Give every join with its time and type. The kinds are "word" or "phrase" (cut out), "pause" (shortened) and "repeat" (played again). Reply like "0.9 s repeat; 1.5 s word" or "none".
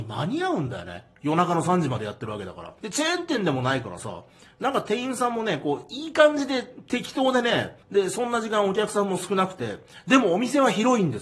2.8 s pause; 7.8 s pause